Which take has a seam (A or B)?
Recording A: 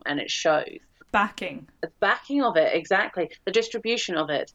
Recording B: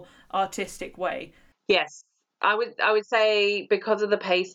A